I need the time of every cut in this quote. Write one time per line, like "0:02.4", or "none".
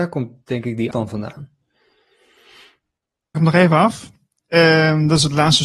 0:00.9
0:03.3